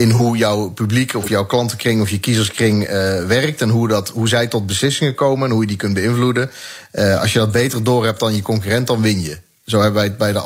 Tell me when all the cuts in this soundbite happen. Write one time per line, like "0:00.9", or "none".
none